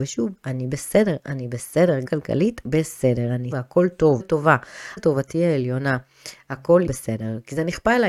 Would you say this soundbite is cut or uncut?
cut